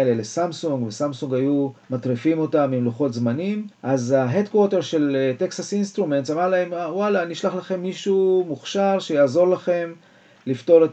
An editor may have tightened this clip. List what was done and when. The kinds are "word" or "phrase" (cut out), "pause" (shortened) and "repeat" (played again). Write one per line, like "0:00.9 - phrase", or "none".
0:01.8 - pause
0:03.7 - pause